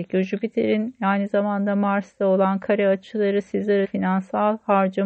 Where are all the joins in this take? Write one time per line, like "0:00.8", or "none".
0:03.8